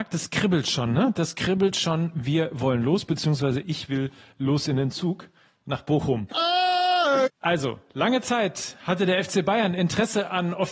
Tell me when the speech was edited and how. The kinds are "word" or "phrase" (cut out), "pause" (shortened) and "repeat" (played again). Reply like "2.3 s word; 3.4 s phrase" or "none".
none